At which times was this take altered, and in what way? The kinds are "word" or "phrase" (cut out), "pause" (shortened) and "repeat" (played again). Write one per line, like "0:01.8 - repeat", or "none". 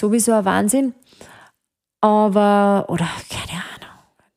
none